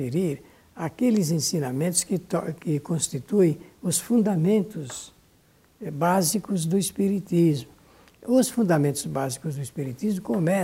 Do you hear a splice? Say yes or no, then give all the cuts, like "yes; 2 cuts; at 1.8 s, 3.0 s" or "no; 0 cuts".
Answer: no; 0 cuts